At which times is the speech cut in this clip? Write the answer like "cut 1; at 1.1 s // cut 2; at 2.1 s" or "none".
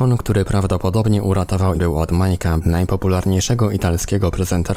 cut 1; at 1.7 s // cut 2; at 2.6 s